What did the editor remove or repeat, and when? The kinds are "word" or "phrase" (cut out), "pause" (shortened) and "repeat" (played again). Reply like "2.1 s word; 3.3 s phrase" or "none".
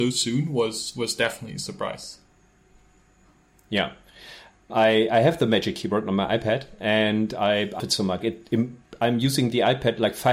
4.7 s word; 7.8 s word; 8.2 s word